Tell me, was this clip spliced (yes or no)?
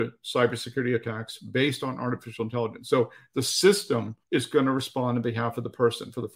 yes